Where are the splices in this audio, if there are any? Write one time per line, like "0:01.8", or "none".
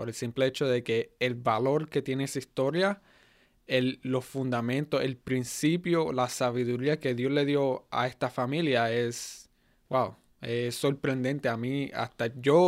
none